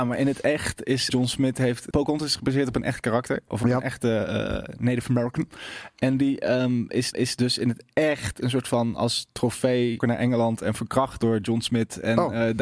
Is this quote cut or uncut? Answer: cut